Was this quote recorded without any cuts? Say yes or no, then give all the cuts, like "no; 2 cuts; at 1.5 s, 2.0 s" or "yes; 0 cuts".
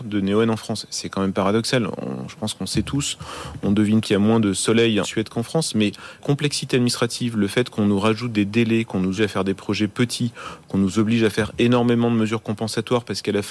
no; 4 cuts; at 4.0 s, 5.0 s, 6.2 s, 9.2 s